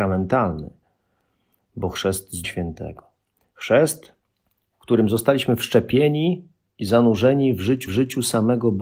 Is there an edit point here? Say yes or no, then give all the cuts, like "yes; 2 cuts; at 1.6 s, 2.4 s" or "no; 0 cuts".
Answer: yes; 3 cuts; at 2.4 s, 4.4 s, 7.9 s